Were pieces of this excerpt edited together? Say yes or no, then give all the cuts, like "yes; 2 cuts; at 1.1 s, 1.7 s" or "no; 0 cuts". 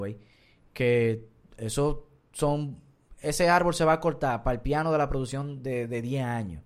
no; 0 cuts